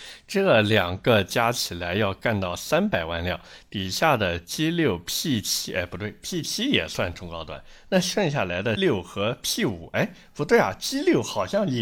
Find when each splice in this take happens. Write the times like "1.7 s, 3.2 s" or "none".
8.8 s